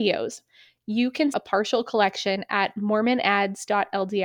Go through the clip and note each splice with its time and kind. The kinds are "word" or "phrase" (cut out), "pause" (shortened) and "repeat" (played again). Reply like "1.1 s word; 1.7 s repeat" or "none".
1.3 s word